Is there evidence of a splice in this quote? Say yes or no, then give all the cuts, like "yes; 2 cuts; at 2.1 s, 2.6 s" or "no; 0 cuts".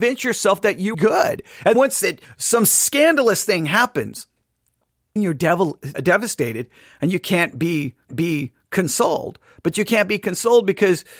yes; 6 cuts; at 0.9 s, 1.7 s, 2.2 s, 5.2 s, 5.9 s, 8.1 s